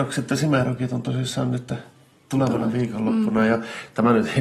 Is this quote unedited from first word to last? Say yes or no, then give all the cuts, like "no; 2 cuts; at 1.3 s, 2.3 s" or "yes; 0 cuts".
yes; 0 cuts